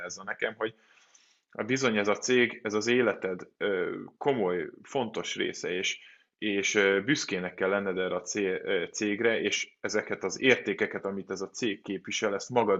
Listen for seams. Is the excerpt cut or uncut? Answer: uncut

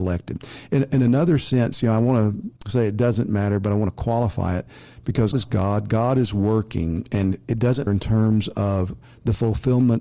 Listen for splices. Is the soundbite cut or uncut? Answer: cut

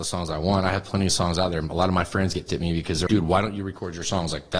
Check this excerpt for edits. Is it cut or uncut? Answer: cut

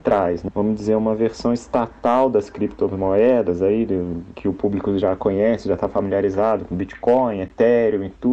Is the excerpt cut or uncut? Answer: uncut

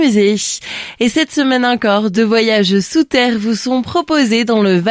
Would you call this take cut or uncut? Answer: uncut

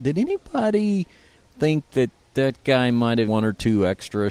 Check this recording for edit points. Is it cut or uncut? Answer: cut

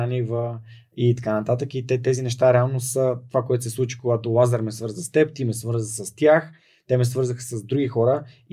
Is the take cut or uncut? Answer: uncut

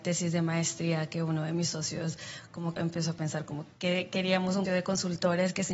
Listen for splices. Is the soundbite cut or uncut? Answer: cut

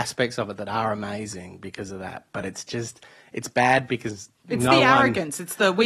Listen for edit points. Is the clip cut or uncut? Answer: uncut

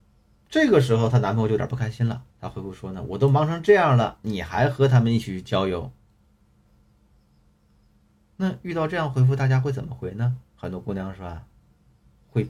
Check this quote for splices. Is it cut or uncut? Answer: cut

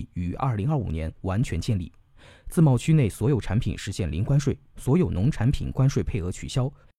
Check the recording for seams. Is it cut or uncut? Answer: uncut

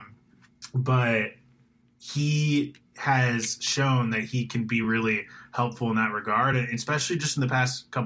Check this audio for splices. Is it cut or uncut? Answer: uncut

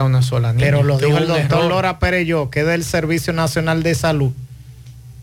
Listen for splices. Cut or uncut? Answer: uncut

